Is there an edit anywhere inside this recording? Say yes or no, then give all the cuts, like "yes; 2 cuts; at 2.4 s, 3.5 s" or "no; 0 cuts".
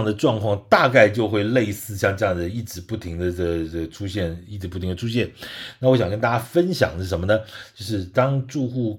no; 0 cuts